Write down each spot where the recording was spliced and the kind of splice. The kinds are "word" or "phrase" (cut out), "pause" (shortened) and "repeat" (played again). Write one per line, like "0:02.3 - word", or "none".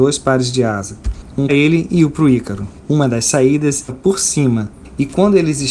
0:01.5 - word
0:03.9 - word